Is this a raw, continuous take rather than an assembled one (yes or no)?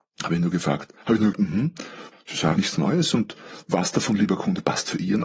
no